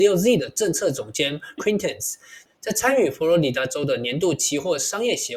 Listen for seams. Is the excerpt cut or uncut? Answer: cut